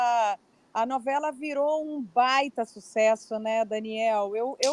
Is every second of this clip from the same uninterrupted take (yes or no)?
yes